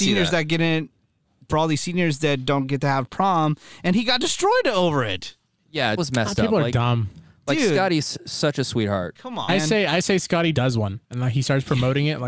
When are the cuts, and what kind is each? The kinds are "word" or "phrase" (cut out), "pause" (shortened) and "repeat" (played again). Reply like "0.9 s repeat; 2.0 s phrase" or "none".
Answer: 1.5 s phrase; 6.0 s phrase; 9.5 s word; 10.5 s word; 11.0 s pause